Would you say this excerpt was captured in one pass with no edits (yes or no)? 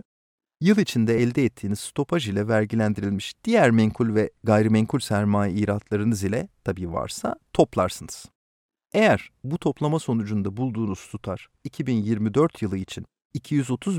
yes